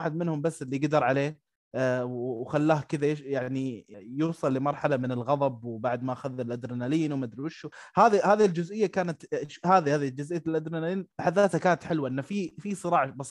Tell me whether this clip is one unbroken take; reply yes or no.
no